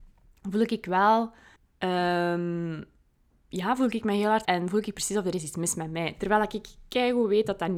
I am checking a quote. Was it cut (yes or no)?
yes